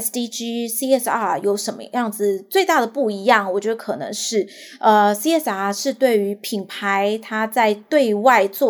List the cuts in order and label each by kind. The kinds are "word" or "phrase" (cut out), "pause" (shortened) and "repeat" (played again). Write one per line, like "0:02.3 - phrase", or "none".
none